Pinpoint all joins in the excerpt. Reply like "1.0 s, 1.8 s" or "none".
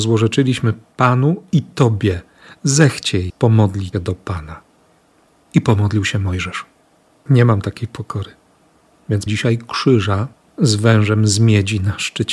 3.3 s, 3.9 s, 9.3 s, 10.5 s